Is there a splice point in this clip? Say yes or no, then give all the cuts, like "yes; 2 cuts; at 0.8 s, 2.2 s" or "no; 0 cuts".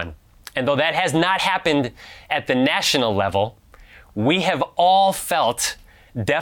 no; 0 cuts